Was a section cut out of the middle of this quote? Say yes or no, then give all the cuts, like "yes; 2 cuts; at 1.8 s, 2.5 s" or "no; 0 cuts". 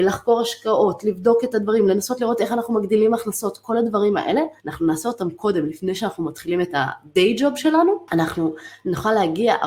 yes; 1 cut; at 4.6 s